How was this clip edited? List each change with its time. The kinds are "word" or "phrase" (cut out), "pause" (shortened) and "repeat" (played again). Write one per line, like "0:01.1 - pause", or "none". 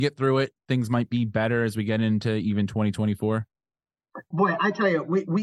0:04.3 - word